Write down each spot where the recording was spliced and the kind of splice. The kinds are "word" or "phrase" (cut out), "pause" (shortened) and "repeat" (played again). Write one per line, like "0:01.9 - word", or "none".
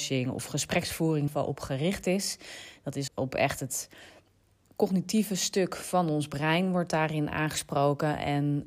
0:01.3 - word
0:03.1 - word
0:04.6 - word